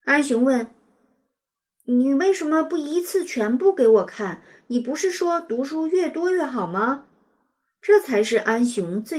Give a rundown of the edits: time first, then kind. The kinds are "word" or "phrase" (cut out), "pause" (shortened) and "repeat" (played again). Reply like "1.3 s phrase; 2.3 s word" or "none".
none

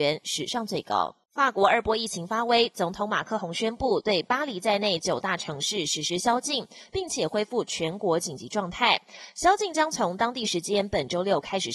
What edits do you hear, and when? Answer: 1.2 s pause

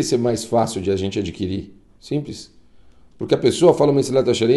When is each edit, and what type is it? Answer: none

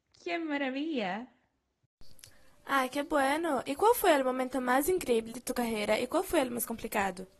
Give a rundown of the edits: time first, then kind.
none

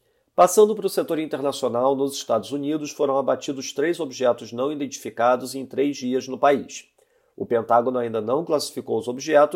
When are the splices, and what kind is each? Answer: none

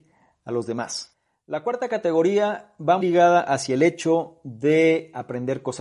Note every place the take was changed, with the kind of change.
3.0 s word

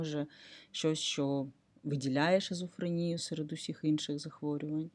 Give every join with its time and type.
none

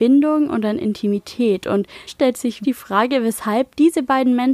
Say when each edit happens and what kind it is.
2.1 s word; 2.6 s word

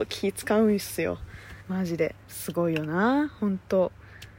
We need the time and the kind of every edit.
1.6 s pause

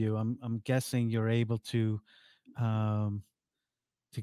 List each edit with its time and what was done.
none

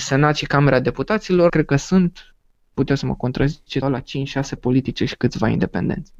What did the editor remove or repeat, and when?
1.5 s phrase; 2.7 s word; 3.8 s word; 4.6 s word

